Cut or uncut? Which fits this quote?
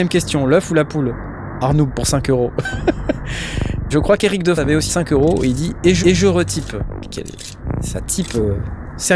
cut